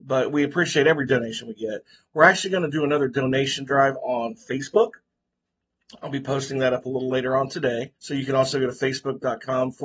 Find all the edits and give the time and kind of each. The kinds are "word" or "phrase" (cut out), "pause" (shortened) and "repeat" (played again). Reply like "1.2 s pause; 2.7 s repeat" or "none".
8.0 s pause